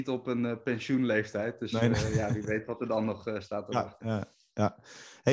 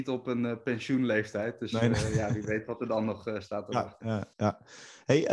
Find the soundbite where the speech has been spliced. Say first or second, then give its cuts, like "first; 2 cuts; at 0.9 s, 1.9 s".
second; 1 cut; at 4.3 s